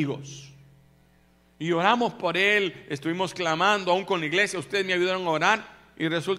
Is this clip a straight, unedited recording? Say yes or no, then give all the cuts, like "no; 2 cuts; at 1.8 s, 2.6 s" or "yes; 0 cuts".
yes; 0 cuts